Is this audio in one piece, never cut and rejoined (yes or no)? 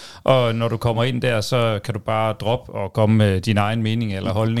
yes